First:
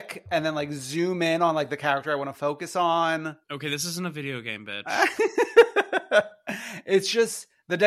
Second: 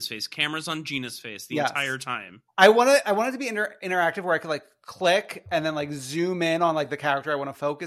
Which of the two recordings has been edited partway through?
first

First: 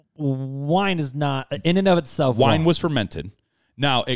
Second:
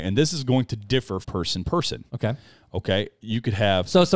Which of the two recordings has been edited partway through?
second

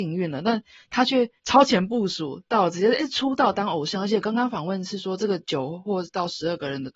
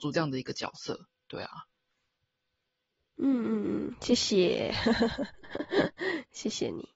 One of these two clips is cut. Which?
first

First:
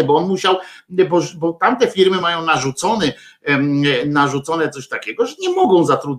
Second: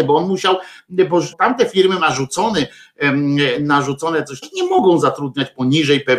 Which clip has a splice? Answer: second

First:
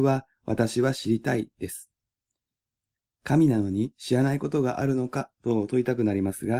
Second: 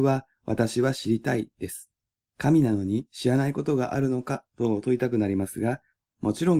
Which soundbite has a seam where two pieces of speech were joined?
second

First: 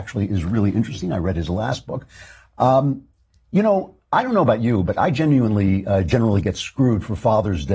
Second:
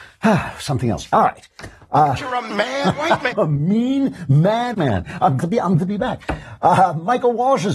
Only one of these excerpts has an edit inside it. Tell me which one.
second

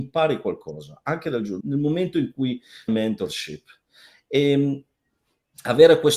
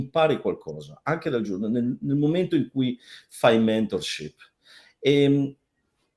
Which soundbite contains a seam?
first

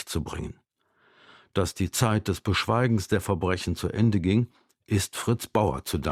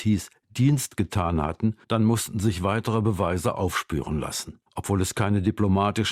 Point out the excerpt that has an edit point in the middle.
second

